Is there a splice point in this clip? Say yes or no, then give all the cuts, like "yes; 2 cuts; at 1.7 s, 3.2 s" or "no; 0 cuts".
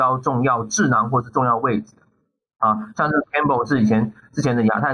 no; 0 cuts